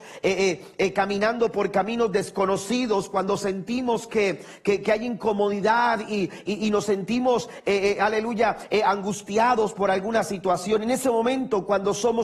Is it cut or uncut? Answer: uncut